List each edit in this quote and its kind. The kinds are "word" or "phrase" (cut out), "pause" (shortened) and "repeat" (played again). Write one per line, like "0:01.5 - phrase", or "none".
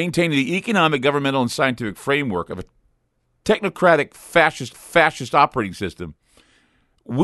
0:04.7 - repeat